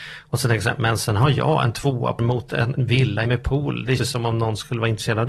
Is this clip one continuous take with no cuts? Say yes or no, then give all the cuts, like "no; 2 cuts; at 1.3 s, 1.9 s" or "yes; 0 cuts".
no; 4 cuts; at 2.2 s, 2.7 s, 3.2 s, 4.0 s